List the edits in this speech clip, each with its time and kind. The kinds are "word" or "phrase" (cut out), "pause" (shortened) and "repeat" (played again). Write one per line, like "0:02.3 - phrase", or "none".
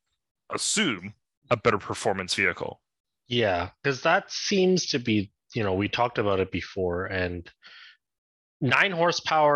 none